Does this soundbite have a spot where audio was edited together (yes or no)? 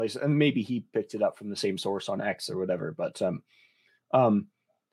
no